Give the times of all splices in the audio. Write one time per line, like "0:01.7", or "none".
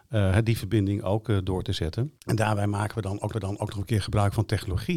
0:02.2
0:03.3